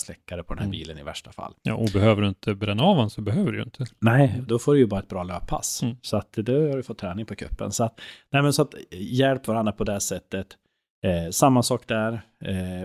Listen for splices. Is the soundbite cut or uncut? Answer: uncut